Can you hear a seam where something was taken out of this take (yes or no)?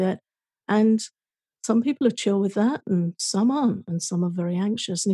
no